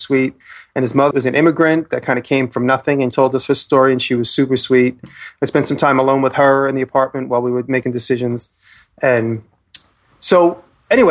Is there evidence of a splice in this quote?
yes; 2 cuts; at 1.1 s, 3.1 s

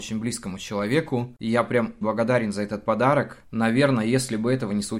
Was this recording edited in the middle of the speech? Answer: yes; 1 cut; at 2.0 s

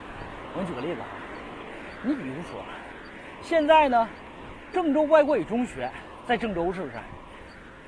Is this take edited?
no; 0 cuts

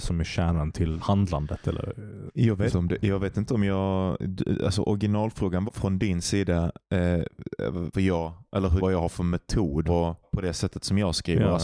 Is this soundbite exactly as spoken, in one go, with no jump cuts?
no; 7 cuts; at 1.0 s, 2.7 s, 5.7 s, 7.9 s, 8.8 s, 9.8 s, 10.2 s

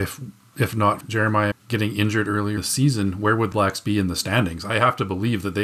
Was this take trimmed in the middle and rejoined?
yes; 4 cuts; at 1.0 s, 1.5 s, 2.6 s, 3.5 s

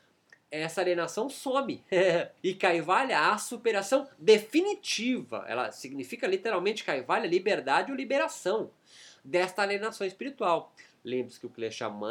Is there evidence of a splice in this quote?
yes; 1 cut; at 2.4 s

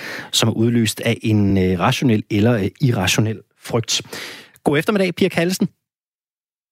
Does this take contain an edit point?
no; 0 cuts

